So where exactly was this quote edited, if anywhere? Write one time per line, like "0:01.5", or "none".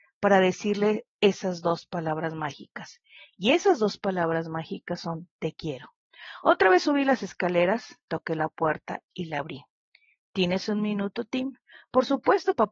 none